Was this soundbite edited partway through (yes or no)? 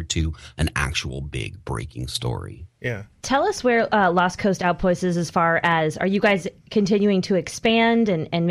no